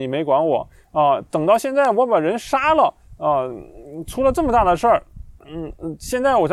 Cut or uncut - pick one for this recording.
cut